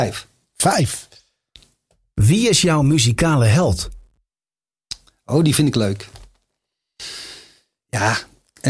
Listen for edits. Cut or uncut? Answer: uncut